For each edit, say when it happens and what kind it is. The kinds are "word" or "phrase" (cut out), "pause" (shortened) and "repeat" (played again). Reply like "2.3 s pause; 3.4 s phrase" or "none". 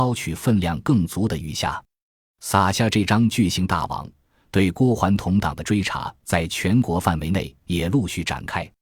none

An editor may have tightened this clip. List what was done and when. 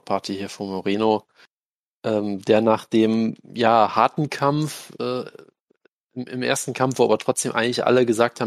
none

